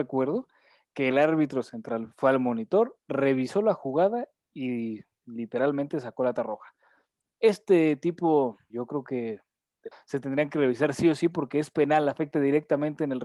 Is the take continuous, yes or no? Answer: no